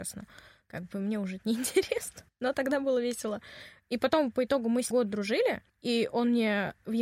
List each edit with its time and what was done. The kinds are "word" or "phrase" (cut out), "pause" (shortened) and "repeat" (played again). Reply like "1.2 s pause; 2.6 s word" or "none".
2.3 s pause; 4.9 s word; 5.7 s pause